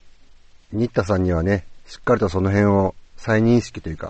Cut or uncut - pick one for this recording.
cut